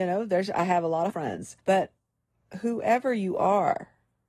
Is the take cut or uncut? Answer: cut